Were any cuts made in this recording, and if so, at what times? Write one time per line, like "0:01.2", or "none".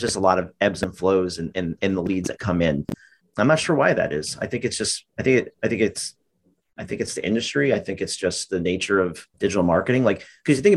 0:09.3